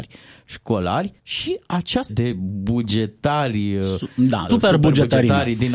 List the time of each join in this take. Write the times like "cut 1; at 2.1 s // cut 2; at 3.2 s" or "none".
cut 1; at 1.2 s // cut 2; at 2.1 s // cut 3; at 4.5 s